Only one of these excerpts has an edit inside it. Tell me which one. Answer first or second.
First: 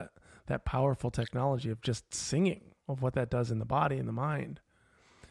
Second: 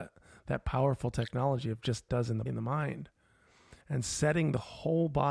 second